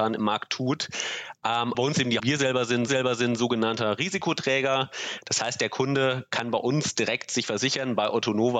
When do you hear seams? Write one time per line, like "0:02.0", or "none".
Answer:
0:01.7
0:02.2
0:02.9